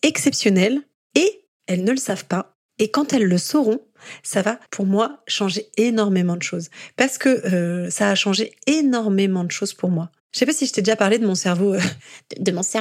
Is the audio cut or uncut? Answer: cut